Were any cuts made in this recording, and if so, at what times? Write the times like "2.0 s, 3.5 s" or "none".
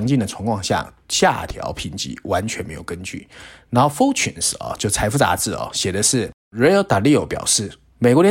none